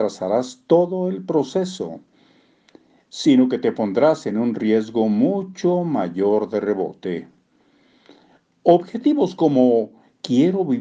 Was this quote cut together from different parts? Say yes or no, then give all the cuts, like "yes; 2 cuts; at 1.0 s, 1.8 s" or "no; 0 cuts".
no; 0 cuts